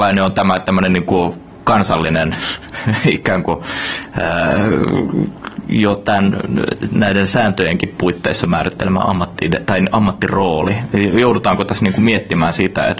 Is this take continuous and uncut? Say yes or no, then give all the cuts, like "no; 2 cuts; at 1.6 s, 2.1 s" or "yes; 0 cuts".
yes; 0 cuts